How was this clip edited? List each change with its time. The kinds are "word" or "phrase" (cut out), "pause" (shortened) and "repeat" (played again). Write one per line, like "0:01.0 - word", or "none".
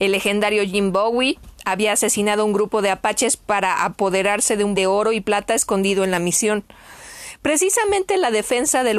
0:04.7 - word